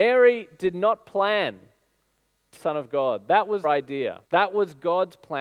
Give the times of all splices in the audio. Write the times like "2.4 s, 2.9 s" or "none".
2.6 s, 3.6 s, 4.3 s